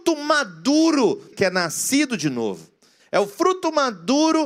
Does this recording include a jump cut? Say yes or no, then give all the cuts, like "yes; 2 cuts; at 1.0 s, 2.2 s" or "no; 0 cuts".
yes; 1 cut; at 1.3 s